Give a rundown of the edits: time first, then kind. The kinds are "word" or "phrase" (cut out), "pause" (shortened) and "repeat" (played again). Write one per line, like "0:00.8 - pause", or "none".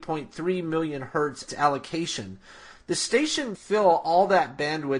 0:01.5 - phrase
0:03.5 - word